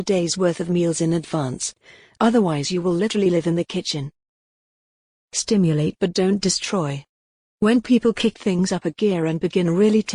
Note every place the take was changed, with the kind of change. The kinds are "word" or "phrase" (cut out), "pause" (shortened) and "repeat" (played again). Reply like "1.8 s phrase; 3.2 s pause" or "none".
none

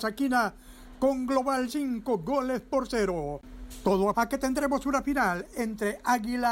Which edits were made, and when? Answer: 1.7 s word; 4.1 s word

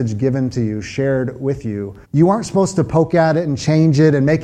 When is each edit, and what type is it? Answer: 2.0 s pause

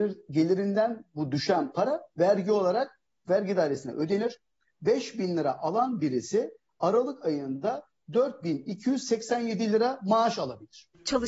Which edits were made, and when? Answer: none

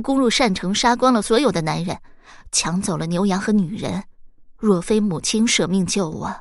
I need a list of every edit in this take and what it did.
4.5 s pause

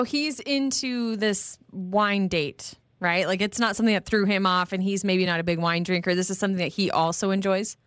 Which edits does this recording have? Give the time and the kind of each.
none

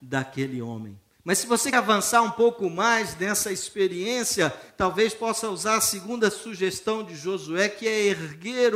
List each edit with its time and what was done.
1.7 s word

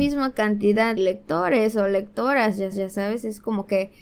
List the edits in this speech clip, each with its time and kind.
1.0 s word; 2.7 s repeat

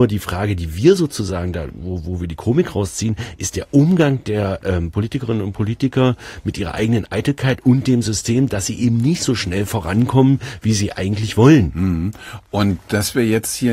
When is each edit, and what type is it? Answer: none

